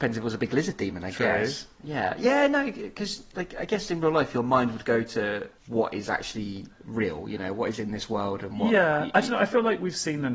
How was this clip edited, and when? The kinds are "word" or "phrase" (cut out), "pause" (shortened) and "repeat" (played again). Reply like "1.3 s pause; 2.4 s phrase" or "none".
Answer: 5.6 s pause; 6.7 s pause